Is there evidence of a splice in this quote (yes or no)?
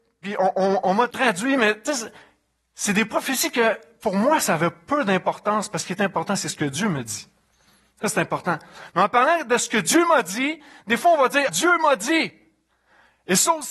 yes